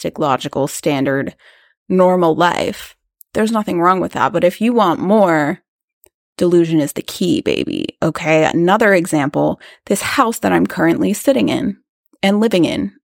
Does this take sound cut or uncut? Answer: uncut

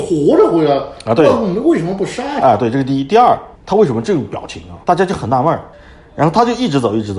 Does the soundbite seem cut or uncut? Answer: cut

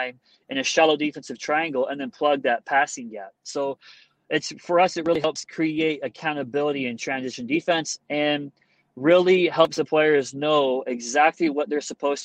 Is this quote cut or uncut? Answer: uncut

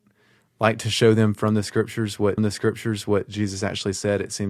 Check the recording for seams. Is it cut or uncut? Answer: cut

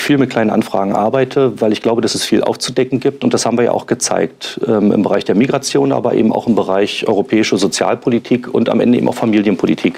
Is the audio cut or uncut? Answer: uncut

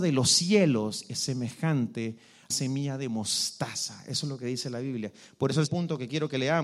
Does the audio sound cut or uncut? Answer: cut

